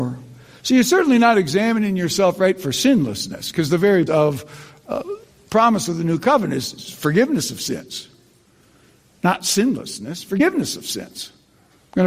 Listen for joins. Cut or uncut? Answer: cut